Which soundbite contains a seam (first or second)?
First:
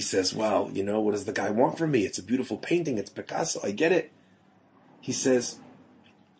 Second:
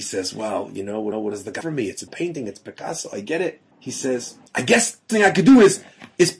second